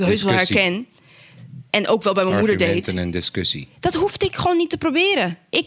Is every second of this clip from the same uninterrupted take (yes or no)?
yes